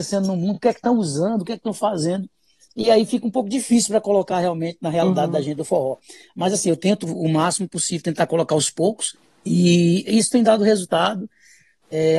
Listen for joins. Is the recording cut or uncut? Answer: uncut